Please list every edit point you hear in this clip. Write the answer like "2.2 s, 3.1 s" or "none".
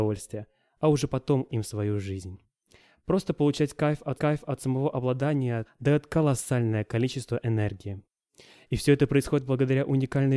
1.5 s, 4.2 s, 5.7 s